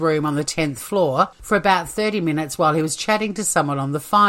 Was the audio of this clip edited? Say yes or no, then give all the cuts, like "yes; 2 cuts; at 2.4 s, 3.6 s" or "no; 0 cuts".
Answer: no; 0 cuts